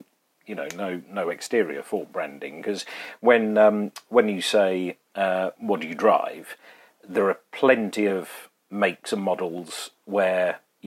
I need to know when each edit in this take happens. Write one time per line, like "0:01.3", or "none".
none